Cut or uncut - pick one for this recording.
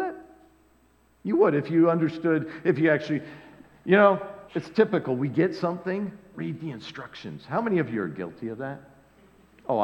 cut